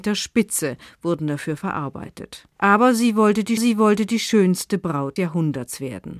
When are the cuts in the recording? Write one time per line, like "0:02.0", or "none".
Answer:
0:02.5
0:03.6
0:05.2